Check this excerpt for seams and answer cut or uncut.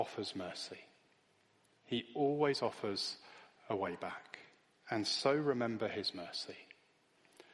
cut